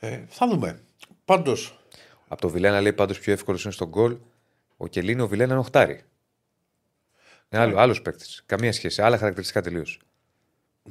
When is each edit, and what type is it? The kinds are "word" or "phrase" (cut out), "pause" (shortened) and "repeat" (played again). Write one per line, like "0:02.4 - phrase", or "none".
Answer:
none